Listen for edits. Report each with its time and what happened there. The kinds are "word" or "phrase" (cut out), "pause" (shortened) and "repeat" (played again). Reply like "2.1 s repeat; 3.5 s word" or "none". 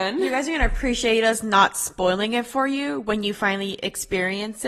none